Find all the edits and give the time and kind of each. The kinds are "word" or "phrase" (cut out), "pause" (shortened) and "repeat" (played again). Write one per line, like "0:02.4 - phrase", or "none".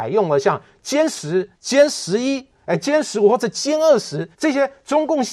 0:01.5 - pause
0:04.3 - pause